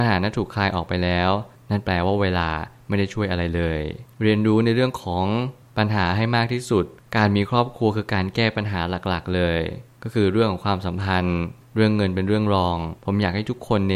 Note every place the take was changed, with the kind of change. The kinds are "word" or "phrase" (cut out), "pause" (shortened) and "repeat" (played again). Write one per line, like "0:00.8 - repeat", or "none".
0:13.0 - pause